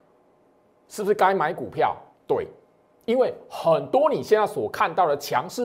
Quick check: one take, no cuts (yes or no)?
yes